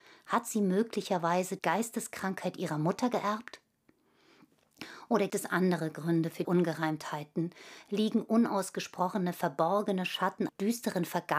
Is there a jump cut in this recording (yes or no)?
yes